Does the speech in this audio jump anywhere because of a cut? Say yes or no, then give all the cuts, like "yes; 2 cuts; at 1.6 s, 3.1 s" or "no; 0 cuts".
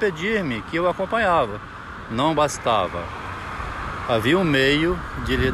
no; 0 cuts